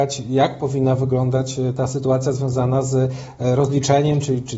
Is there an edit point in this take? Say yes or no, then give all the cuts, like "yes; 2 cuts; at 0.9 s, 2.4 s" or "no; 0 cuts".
no; 0 cuts